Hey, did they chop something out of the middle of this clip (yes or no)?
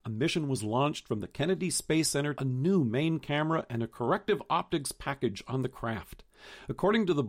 yes